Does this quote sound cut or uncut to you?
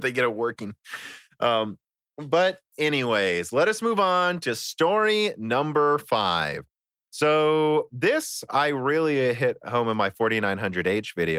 uncut